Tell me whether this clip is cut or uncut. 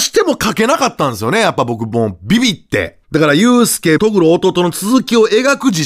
cut